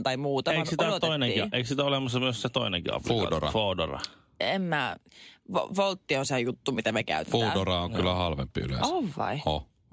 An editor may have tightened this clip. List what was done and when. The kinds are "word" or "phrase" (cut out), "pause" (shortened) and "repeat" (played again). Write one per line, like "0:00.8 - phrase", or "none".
none